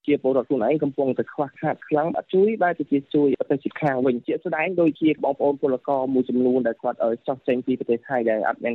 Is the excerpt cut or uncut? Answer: uncut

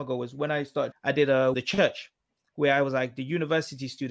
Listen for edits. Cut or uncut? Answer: cut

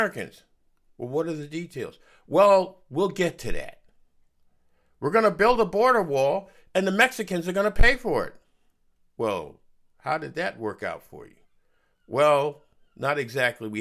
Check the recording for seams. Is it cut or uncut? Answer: uncut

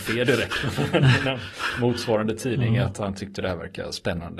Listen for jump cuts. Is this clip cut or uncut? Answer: uncut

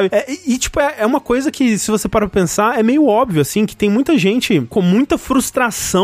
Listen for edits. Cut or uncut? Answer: uncut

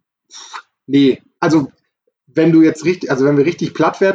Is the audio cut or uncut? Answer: uncut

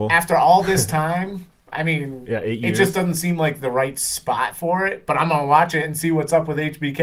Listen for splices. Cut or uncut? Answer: uncut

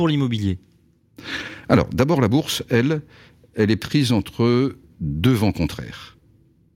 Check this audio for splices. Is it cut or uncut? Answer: uncut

